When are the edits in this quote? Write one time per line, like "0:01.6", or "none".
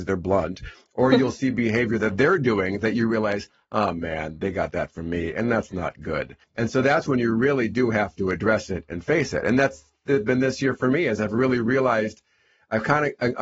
0:06.4